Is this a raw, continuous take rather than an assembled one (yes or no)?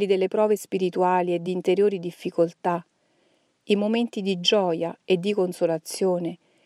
yes